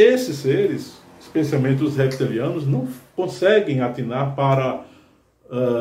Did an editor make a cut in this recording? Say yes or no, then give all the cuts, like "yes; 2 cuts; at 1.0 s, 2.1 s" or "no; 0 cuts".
no; 0 cuts